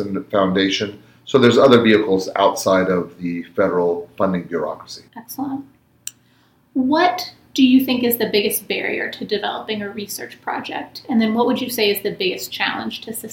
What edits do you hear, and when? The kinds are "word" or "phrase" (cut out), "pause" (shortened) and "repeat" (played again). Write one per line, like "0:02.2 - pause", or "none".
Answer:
0:05.1 - pause